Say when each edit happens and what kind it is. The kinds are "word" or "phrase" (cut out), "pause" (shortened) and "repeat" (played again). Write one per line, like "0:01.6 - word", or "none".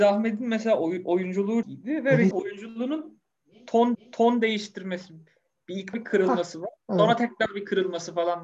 0:01.6 - word
0:02.3 - word
0:03.9 - repeat
0:05.9 - word
0:06.8 - pause